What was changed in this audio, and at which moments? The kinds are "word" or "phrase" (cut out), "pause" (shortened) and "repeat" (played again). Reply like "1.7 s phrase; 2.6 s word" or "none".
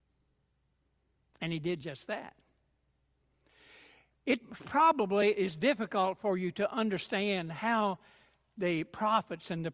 none